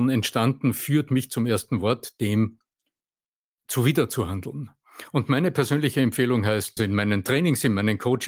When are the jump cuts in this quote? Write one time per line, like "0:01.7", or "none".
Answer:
0:06.8